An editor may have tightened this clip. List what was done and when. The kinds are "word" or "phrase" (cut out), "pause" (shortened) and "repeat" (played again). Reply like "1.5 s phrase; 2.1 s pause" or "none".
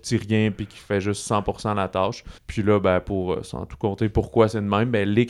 2.4 s pause

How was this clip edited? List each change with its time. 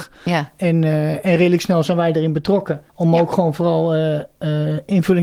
2.9 s pause

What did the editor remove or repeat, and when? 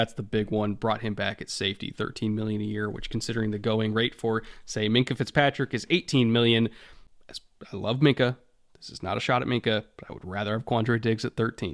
none

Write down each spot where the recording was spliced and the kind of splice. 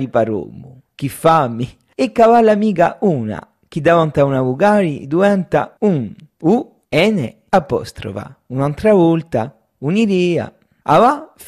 none

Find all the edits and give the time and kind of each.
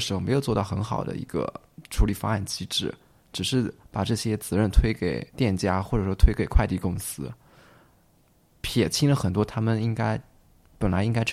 5.3 s pause

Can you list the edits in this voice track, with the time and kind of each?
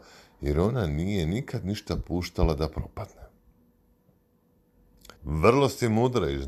5.2 s pause

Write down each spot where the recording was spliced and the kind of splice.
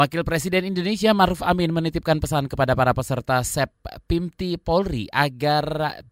none

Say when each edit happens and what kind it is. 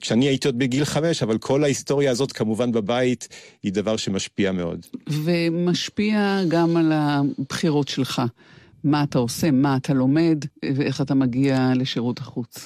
10.5 s pause

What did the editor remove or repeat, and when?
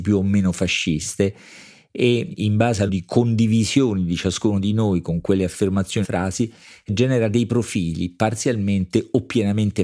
2.9 s word; 6.0 s phrase

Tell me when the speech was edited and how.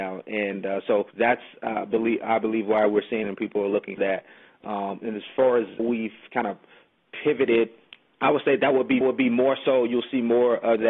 1.1 s pause; 3.2 s phrase; 4.0 s word; 5.0 s word; 5.8 s word; 7.9 s pause; 9.0 s repeat

